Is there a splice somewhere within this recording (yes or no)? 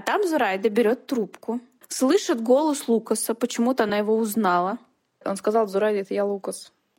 no